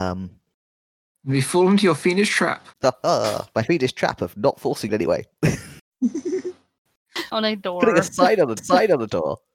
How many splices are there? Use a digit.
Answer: 4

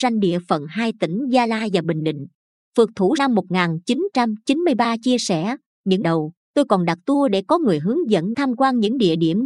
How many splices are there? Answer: 3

